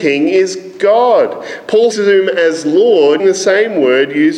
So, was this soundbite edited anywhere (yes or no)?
yes